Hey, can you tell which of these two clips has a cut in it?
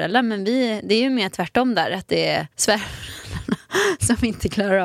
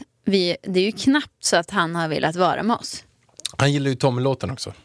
first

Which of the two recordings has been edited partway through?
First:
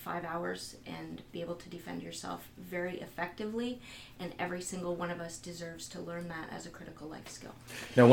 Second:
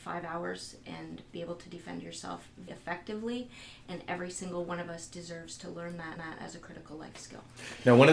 second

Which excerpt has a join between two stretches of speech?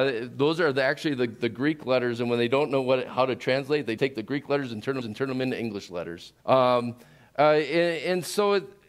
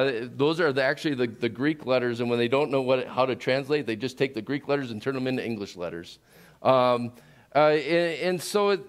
first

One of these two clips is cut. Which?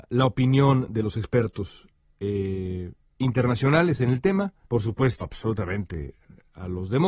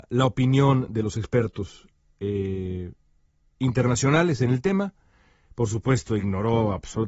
first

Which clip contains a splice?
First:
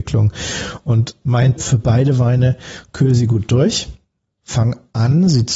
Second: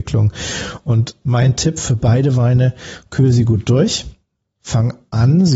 first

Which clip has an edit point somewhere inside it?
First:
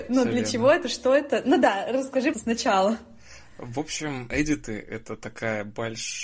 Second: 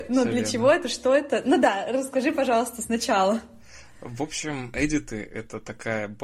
first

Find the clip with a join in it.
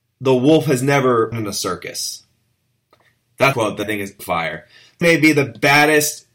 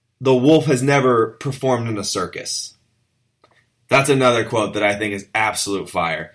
first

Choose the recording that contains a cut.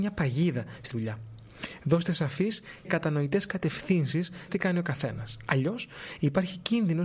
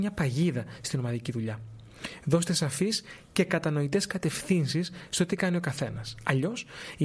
first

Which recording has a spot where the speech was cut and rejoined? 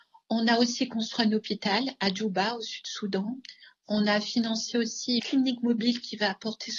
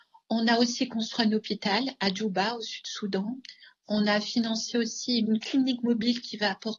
first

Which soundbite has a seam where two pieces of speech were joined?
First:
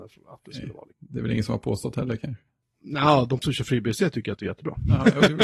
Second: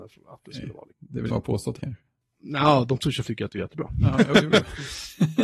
second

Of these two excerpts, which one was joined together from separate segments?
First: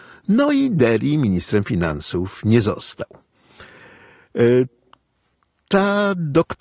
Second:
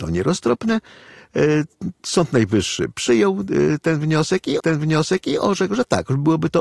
second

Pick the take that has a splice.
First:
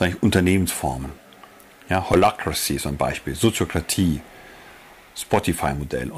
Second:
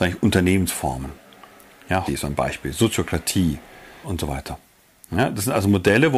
second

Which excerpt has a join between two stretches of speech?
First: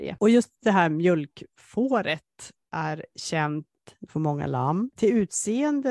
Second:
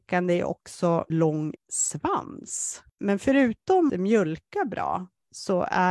second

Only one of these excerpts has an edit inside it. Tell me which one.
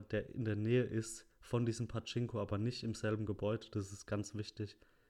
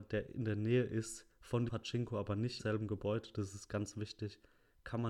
second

